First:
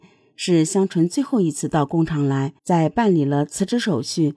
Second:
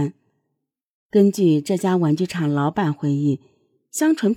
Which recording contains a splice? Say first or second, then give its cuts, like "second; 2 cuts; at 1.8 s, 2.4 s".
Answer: first; 1 cut; at 2.6 s